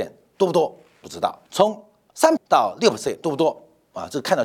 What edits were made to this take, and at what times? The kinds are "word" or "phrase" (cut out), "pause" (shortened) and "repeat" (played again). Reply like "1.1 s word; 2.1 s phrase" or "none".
1.5 s pause; 2.4 s word

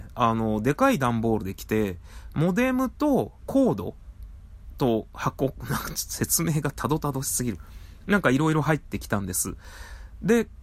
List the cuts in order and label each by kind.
3.4 s phrase

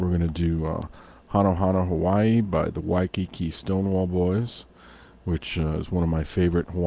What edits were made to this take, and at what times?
none

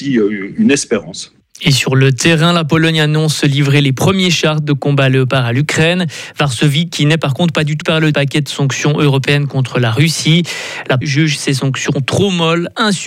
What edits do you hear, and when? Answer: 7.8 s word; 8.1 s word; 11.0 s word

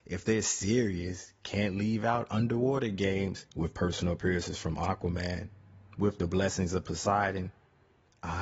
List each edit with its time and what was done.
none

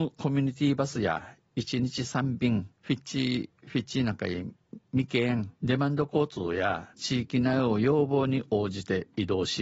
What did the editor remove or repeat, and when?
2.7 s pause; 5.6 s pause; 6.9 s pause

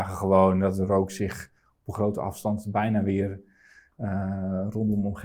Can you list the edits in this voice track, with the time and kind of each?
none

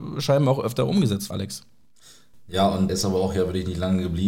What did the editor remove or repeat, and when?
1.3 s word; 2.9 s word

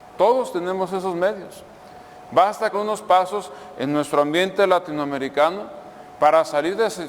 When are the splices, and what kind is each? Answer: 2.7 s word

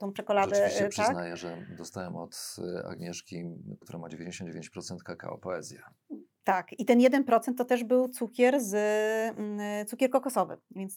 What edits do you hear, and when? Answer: 3.8 s word

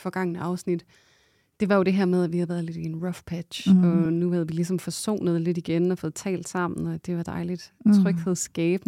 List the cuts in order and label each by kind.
none

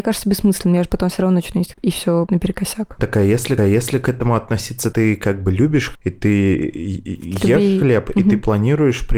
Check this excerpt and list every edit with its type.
1.7 s word; 2.3 s word; 3.6 s repeat; 4.9 s word; 5.9 s word

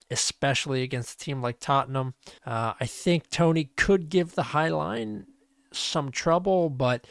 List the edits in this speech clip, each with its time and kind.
2.4 s pause

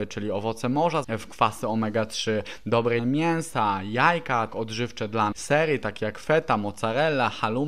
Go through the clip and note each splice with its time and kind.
1.0 s word; 3.0 s phrase; 4.5 s word; 5.3 s word

